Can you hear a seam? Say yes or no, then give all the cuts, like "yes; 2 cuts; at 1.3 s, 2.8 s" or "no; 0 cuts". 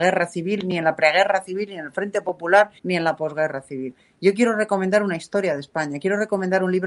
yes; 1 cut; at 2.8 s